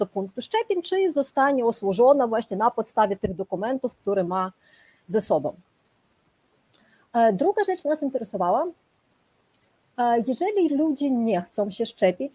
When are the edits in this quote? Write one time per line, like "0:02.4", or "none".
none